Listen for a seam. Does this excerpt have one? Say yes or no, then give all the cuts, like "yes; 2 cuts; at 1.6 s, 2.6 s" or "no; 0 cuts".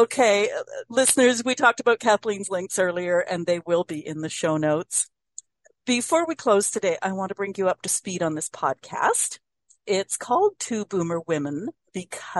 no; 0 cuts